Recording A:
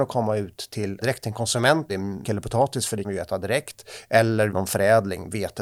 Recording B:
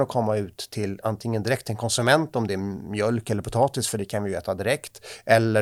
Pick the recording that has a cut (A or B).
A